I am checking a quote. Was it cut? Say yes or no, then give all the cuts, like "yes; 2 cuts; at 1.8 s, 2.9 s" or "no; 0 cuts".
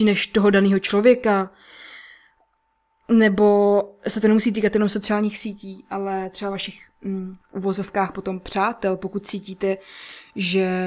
no; 0 cuts